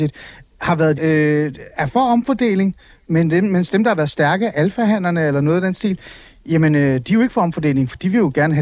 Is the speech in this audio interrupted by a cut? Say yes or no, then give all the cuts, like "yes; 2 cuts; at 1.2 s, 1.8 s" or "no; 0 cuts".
yes; 1 cut; at 1.0 s